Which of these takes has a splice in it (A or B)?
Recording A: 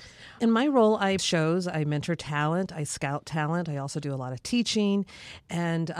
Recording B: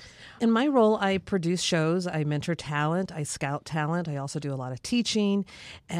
A